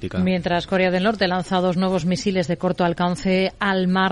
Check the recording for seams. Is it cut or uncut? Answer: uncut